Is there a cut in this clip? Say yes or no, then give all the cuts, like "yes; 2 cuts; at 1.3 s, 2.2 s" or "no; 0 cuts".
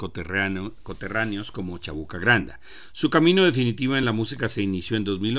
no; 0 cuts